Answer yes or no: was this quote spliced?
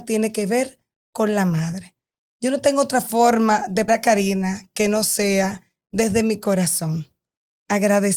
yes